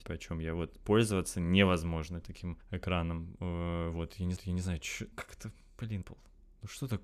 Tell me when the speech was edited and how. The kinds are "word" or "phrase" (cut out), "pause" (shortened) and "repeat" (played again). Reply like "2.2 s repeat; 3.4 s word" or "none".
4.4 s repeat; 5.1 s word; 6.0 s word